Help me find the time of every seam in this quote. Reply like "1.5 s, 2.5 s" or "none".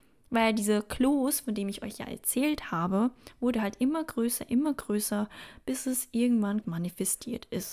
6.6 s